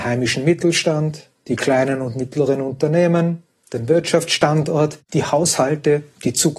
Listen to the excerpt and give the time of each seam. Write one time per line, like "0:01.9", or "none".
0:05.0